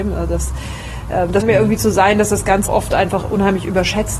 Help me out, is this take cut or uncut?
cut